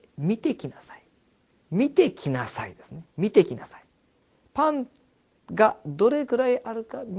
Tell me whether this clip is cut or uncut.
cut